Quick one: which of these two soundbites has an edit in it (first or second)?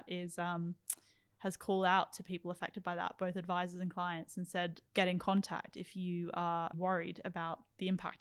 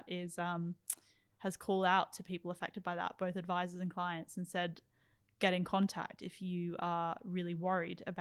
first